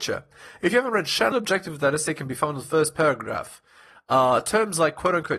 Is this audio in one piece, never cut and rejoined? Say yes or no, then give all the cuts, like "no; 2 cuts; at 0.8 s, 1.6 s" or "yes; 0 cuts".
no; 1 cut; at 1.3 s